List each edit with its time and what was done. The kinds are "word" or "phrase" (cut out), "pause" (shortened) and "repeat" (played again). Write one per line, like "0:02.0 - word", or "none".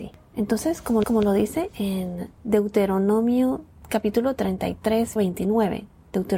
0:01.0 - repeat
0:02.4 - pause
0:05.2 - word